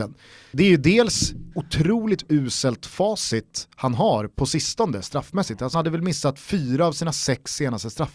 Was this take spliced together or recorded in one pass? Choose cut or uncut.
cut